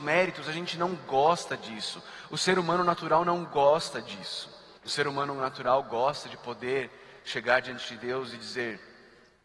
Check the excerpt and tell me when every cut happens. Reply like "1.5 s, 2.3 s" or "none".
4.8 s